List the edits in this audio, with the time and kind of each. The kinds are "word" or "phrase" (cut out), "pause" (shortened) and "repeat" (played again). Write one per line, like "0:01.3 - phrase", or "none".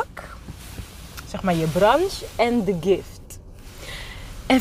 none